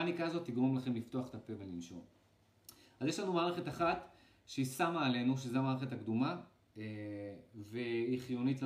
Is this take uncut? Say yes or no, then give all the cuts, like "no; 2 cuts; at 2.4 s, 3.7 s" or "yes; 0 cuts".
yes; 0 cuts